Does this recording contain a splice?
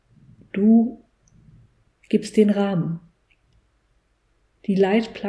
no; 0 cuts

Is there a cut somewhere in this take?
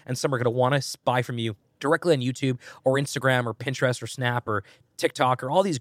no; 0 cuts

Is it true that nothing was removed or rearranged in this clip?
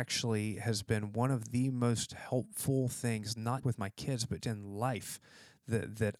no; 2 cuts; at 3.6 s, 4.4 s

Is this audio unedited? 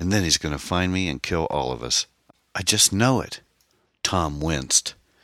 yes; 0 cuts

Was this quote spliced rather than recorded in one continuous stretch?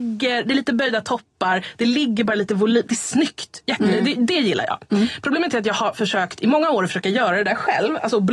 no; 0 cuts

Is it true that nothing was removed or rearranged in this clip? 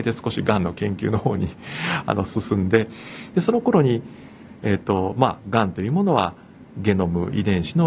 no; 1 cut; at 6.7 s

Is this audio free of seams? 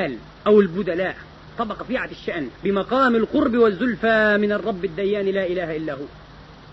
no; 2 cuts; at 1.8 s, 2.5 s

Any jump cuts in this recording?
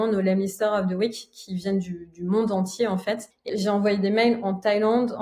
yes; 1 cut; at 3.5 s

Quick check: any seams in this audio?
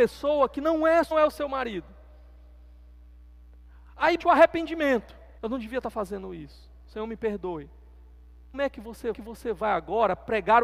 yes; 5 cuts; at 1.1 s, 4.2 s, 5.4 s, 8.5 s, 9.1 s

